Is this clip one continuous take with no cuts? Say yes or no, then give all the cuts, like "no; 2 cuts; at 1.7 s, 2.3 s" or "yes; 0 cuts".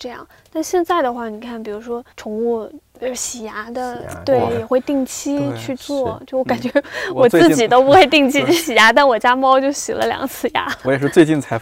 no; 2 cuts; at 2.1 s, 2.9 s